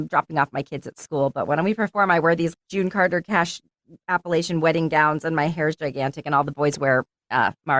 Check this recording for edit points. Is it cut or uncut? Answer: cut